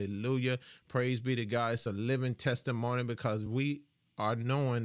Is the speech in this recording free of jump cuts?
yes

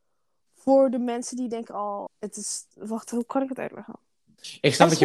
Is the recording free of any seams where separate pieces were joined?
no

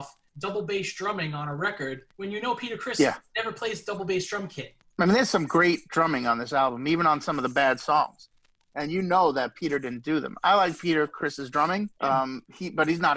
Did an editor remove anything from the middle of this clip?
yes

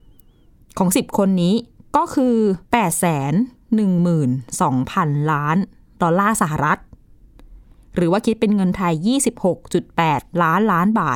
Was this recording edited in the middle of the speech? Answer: yes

